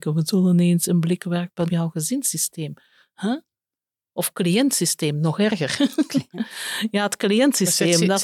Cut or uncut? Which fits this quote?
cut